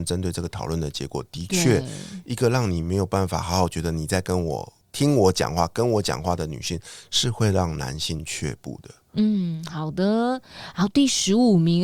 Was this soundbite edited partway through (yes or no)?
yes